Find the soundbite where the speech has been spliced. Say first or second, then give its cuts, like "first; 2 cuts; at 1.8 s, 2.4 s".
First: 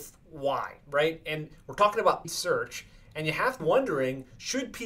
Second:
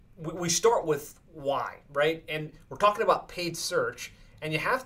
first; 2 cuts; at 2.2 s, 3.6 s